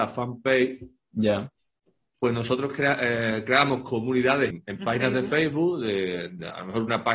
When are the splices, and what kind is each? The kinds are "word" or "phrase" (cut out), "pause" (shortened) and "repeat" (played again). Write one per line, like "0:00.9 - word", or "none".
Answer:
0:04.5 - word